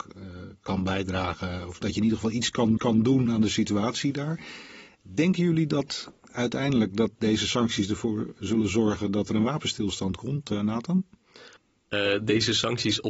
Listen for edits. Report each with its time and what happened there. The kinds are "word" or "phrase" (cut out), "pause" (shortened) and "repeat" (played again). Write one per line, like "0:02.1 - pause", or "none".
0:02.8 - repeat
0:11.6 - pause